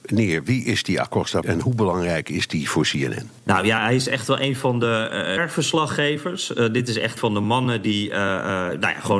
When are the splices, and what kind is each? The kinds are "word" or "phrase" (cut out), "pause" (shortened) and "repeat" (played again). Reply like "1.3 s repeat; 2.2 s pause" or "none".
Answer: 1.4 s word; 5.4 s word; 7.2 s word